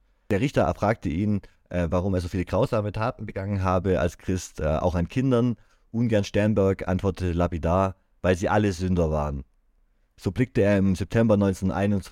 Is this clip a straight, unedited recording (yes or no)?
yes